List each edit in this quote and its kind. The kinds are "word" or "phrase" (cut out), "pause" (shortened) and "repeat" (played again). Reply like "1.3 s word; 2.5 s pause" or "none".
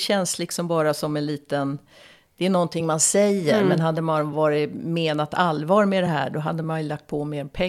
none